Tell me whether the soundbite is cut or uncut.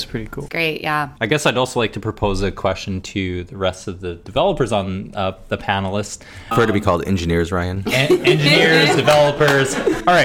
cut